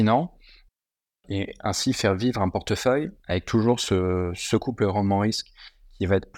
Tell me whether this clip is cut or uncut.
cut